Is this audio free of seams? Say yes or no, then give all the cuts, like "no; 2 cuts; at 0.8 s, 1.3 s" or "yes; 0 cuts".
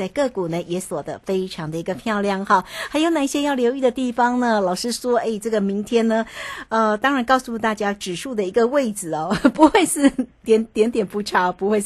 yes; 0 cuts